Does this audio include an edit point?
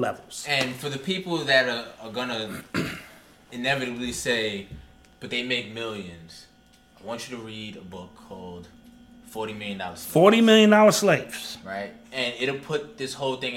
no; 0 cuts

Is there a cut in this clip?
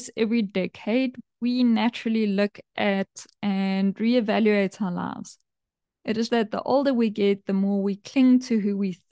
yes; 1 cut; at 6.3 s

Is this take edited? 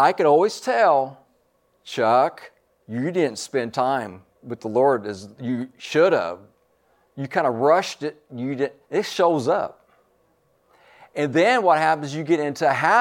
yes; 1 cut; at 8.8 s

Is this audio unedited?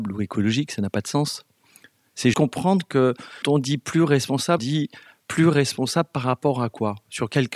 no; 3 cuts; at 2.3 s, 3.4 s, 4.6 s

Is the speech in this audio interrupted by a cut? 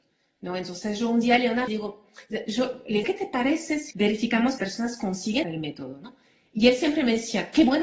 yes; 5 cuts; at 1.7 s, 3.0 s, 3.9 s, 4.6 s, 5.4 s

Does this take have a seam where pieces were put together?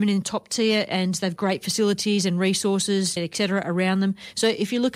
yes; 2 cuts; at 1.4 s, 3.2 s

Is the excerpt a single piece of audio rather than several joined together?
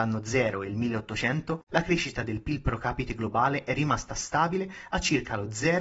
yes; 0 cuts

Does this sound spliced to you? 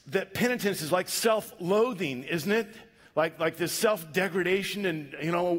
no; 0 cuts

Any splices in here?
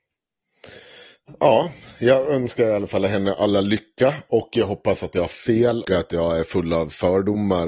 yes; 1 cut; at 5.8 s

